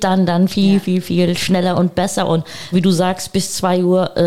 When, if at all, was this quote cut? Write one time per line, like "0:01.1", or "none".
0:01.0
0:02.7